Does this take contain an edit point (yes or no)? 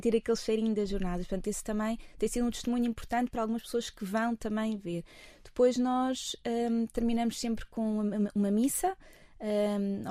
no